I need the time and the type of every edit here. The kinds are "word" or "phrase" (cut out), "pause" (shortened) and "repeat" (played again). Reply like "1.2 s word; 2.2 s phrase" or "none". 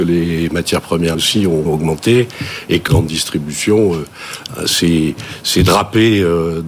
1.1 s word; 1.7 s word; 2.9 s word; 4.5 s word